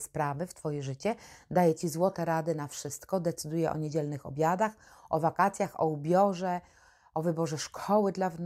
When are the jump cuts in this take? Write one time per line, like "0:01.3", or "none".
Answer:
none